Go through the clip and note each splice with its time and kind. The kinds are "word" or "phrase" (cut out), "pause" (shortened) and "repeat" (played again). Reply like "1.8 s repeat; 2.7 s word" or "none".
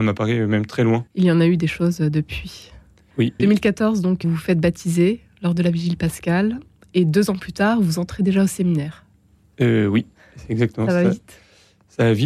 1.1 s pause; 3.4 s word; 4.2 s word